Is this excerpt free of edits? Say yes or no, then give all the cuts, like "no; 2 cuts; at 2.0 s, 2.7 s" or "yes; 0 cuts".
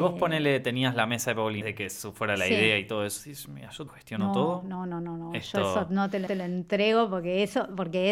no; 3 cuts; at 1.6 s, 3.9 s, 6.3 s